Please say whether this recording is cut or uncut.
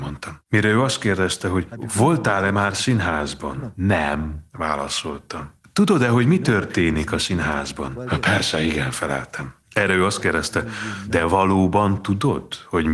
uncut